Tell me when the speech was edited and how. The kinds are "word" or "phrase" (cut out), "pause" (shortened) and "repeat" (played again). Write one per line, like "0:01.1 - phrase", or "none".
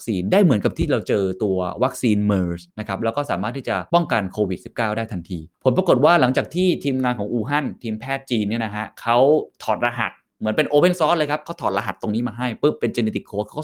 0:02.7 - pause